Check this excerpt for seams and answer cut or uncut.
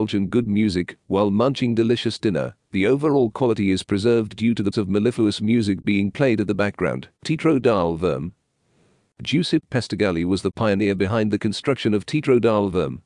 cut